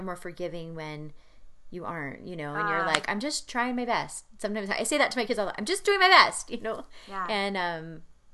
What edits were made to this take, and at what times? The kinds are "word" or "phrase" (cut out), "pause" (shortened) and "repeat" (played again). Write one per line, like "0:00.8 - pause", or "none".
none